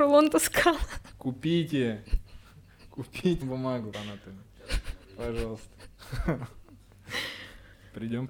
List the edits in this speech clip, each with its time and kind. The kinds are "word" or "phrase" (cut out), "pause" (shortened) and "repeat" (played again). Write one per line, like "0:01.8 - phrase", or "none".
0:03.4 - word
0:03.9 - phrase
0:05.0 - pause